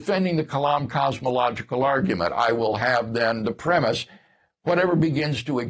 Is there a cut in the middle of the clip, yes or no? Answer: no